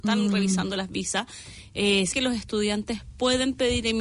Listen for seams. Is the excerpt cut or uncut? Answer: cut